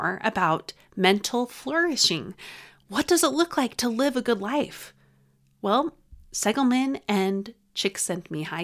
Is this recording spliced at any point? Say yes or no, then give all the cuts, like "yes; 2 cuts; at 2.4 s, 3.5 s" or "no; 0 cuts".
no; 0 cuts